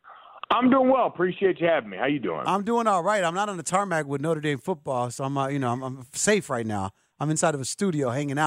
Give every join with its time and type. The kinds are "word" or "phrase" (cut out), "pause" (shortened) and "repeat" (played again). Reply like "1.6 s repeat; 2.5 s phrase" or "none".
none

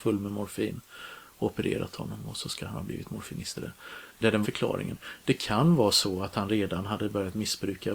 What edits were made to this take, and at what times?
3.5 s word; 4.1 s pause; 4.4 s word

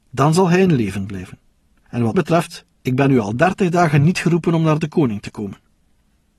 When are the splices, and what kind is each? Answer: 2.1 s word

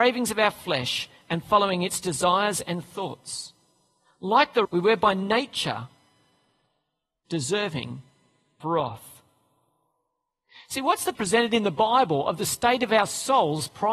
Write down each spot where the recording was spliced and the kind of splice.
4.6 s word; 8.6 s word; 11.1 s word

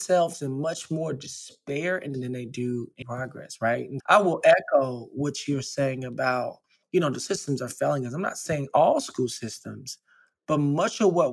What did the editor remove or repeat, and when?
2.1 s word; 3.0 s word; 4.0 s word; 6.8 s pause; 7.2 s word

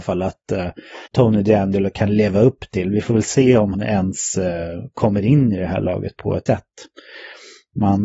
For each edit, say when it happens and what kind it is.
1.1 s pause; 3.7 s word; 6.1 s word; 6.5 s word

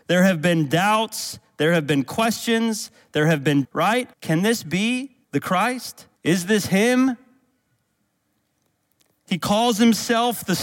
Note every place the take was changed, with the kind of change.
3.6 s word; 4.1 s pause; 5.2 s pause; 6.2 s pause

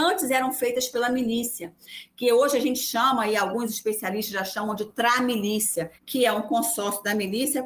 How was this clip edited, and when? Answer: 6.0 s pause

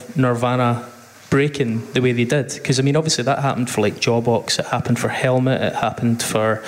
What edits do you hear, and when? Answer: none

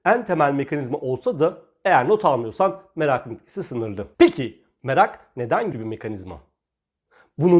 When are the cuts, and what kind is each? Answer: 4.1 s pause; 5.7 s word

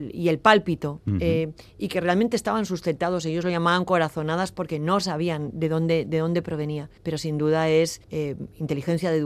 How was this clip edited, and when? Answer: 7.0 s pause; 8.0 s pause

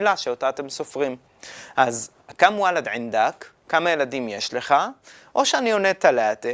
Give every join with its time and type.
none

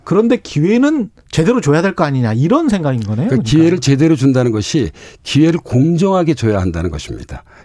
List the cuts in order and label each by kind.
1.2 s pause

